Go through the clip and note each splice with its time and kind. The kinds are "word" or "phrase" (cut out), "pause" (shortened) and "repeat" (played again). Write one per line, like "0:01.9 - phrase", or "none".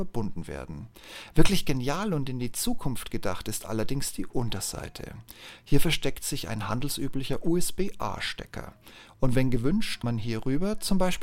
0:10.0 - word